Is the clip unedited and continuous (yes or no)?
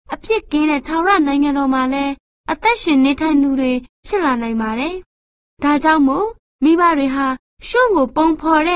yes